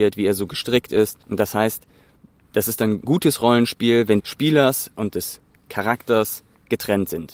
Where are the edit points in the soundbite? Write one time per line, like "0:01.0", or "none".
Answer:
0:01.2
0:03.0
0:04.2